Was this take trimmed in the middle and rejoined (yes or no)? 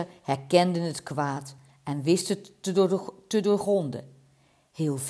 no